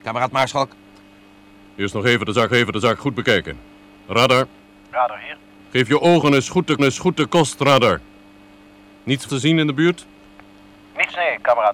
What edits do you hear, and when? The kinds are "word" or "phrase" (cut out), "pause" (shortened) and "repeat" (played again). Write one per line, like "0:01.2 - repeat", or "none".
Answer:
0:02.5 - repeat
0:04.6 - pause
0:05.6 - pause
0:06.8 - repeat
0:09.3 - word